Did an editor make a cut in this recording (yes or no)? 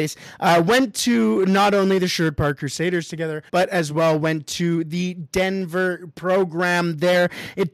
yes